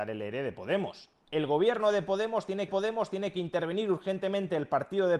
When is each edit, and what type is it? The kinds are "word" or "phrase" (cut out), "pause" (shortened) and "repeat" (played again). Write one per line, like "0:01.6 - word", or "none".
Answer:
0:02.7 - repeat

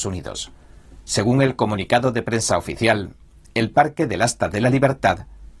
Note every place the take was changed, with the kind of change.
none

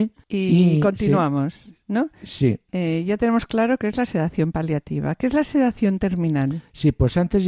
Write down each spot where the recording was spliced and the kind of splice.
none

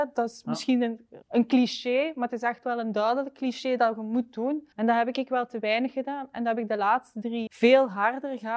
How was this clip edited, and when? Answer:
0:01.2 - pause
0:04.7 - pause
0:07.5 - word

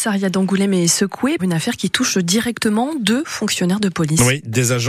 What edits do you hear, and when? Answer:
0:01.4 - word

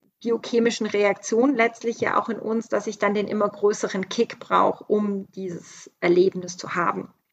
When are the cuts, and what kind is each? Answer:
none

